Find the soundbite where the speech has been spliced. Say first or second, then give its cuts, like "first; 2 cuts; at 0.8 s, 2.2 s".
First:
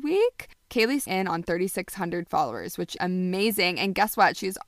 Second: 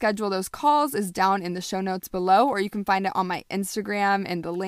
first; 2 cuts; at 1.1 s, 3.0 s